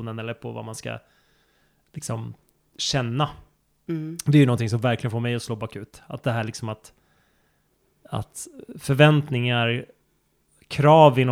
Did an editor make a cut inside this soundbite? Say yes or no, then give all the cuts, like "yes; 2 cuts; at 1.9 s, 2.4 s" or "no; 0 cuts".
no; 0 cuts